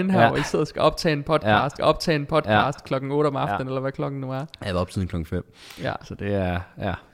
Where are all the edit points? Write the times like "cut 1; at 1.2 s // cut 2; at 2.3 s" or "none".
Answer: cut 1; at 1.8 s